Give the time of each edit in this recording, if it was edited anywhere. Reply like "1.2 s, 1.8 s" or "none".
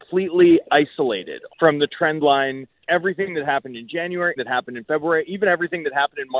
1.5 s, 2.8 s, 4.4 s